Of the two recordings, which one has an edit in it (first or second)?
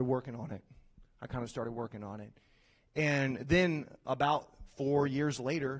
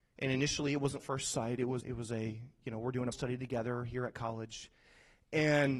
second